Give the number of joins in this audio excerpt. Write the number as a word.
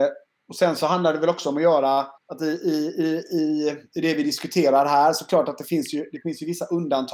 one